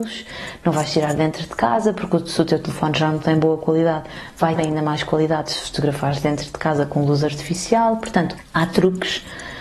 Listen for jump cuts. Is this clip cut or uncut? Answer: cut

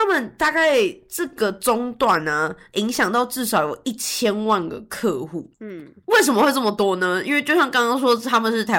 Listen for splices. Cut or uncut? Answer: uncut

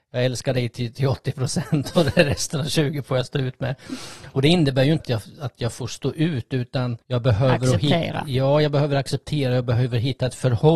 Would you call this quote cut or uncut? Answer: cut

